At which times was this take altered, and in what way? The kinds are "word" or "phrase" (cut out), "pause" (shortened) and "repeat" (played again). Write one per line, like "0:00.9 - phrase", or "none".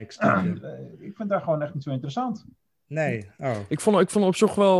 none